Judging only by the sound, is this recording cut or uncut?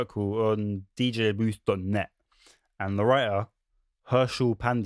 uncut